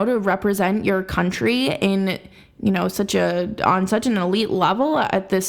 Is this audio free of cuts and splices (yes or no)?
yes